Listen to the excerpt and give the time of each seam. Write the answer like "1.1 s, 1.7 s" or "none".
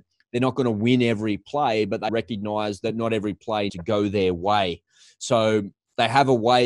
2.1 s, 3.7 s